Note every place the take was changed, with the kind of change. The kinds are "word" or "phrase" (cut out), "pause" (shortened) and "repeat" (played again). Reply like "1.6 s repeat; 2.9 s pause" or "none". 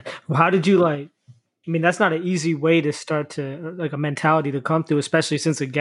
none